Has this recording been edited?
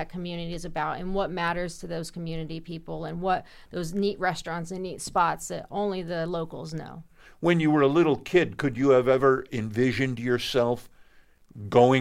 no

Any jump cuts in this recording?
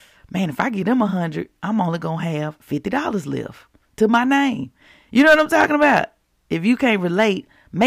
no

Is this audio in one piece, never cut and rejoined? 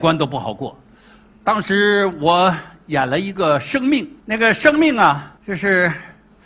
no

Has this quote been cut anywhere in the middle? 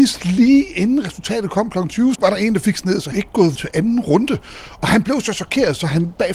yes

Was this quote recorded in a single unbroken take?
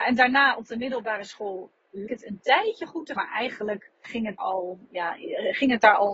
no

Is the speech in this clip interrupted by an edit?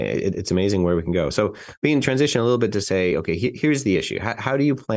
no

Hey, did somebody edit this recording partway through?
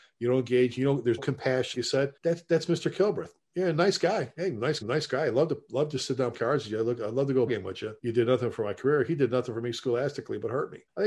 yes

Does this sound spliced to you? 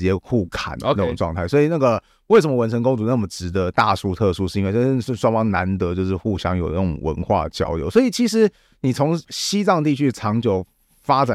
no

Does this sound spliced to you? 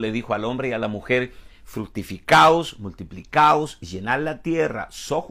no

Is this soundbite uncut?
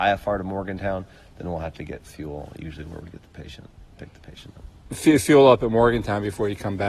yes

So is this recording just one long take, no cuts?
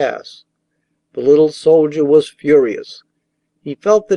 yes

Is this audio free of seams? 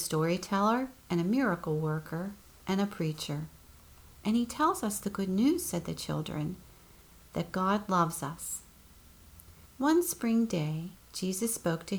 yes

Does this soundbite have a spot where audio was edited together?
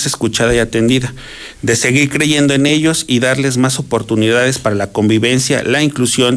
no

